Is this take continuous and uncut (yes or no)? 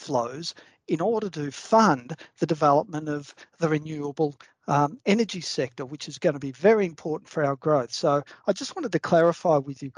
yes